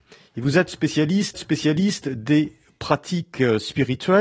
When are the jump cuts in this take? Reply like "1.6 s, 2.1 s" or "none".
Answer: 1.3 s